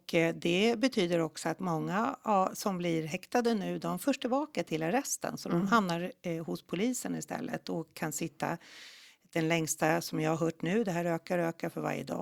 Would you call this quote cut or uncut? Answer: uncut